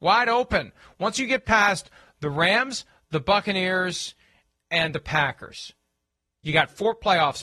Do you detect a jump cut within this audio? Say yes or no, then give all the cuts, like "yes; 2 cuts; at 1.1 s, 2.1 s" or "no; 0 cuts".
no; 0 cuts